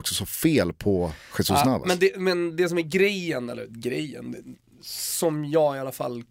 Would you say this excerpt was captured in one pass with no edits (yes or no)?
yes